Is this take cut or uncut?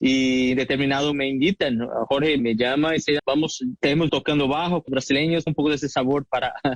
cut